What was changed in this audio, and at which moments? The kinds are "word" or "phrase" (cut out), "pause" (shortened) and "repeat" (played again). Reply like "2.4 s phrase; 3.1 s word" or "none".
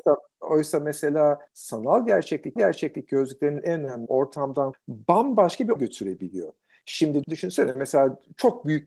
1.5 s pause; 2.6 s repeat; 4.1 s phrase; 4.7 s word; 5.8 s word; 7.2 s word